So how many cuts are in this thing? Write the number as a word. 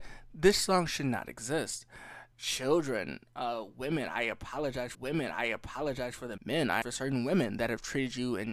four